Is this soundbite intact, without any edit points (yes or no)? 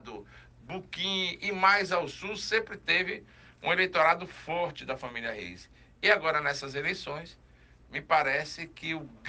yes